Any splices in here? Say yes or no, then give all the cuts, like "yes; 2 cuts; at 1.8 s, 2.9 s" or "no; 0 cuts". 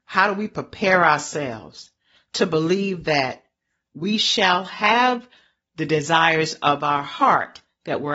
no; 0 cuts